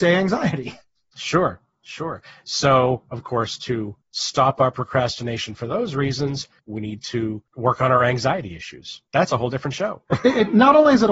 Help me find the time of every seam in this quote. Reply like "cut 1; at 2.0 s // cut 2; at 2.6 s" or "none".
cut 1; at 4.0 s // cut 2; at 6.6 s // cut 3; at 7.5 s // cut 4; at 9.1 s // cut 5; at 10.1 s